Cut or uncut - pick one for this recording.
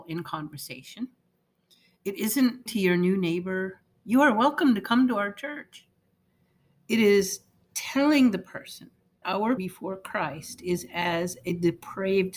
cut